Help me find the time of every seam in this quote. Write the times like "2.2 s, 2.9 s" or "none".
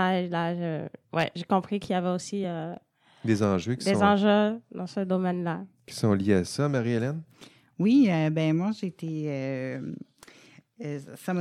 none